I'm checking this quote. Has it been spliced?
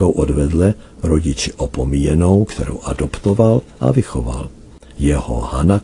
no; 0 cuts

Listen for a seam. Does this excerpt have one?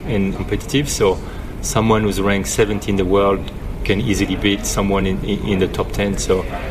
no; 0 cuts

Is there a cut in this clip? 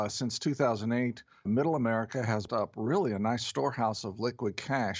yes; 2 cuts; at 1.5 s, 2.5 s

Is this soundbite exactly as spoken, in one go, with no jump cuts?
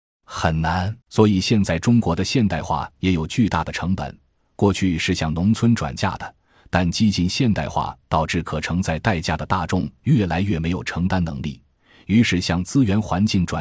no; 1 cut; at 1.0 s

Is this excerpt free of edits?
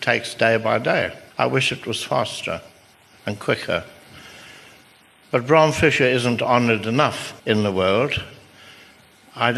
no; 2 cuts; at 1.3 s, 7.4 s

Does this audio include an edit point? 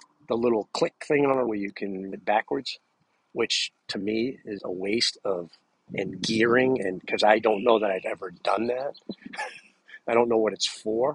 yes; 4 cuts; at 1.5 s, 2.1 s, 4.6 s, 5.9 s

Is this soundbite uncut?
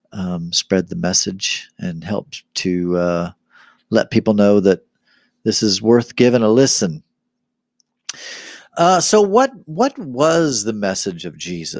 yes; 0 cuts

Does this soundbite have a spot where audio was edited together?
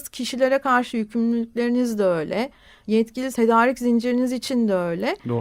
yes; 1 cut; at 3.3 s

